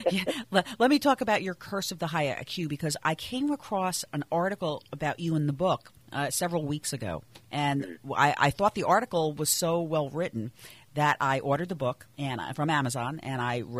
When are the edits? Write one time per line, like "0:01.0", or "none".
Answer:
0:06.0